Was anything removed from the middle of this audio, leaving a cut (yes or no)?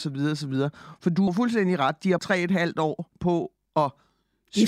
yes